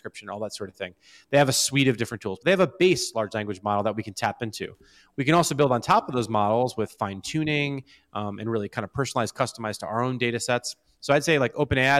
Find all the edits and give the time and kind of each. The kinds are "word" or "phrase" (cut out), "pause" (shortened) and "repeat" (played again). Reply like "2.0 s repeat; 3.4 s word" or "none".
none